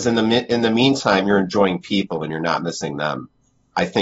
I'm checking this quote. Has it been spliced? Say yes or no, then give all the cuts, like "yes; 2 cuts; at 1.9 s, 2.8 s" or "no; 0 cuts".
no; 0 cuts